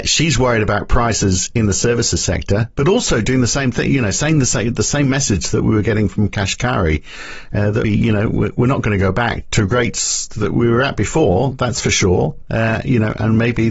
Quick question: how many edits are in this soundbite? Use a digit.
2